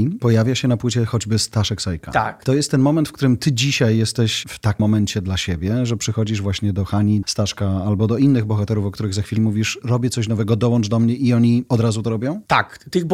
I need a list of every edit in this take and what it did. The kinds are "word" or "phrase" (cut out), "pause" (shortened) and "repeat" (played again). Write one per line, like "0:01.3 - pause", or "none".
0:04.8 - word
0:07.2 - word
0:09.4 - word